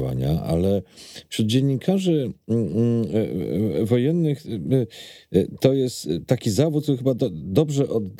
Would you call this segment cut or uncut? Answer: uncut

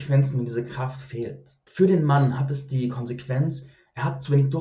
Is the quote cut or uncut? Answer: cut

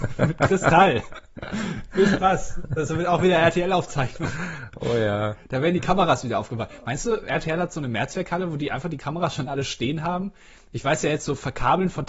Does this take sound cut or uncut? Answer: uncut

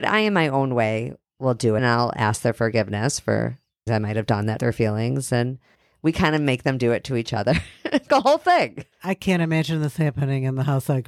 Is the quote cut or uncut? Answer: cut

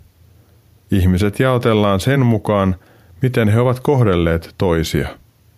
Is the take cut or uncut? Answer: uncut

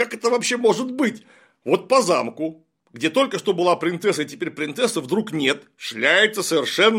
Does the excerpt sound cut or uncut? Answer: uncut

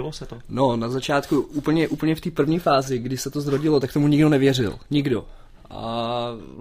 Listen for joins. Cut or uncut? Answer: uncut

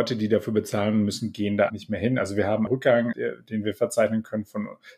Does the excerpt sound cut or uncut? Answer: cut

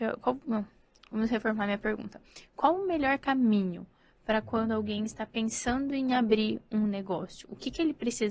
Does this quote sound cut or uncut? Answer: uncut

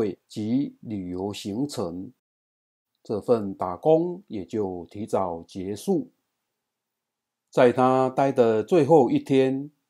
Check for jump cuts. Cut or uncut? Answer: uncut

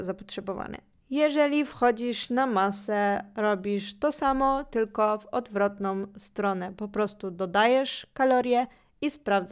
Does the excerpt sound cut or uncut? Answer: uncut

